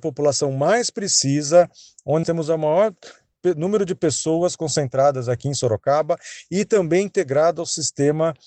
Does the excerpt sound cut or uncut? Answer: cut